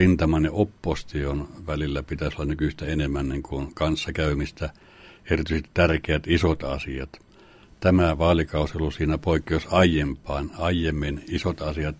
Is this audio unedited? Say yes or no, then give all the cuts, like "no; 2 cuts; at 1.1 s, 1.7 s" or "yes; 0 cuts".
yes; 0 cuts